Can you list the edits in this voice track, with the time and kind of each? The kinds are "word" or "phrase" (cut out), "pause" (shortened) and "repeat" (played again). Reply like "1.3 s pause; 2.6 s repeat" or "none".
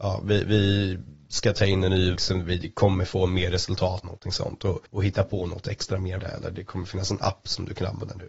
2.2 s word; 4.0 s phrase; 4.9 s pause; 6.2 s word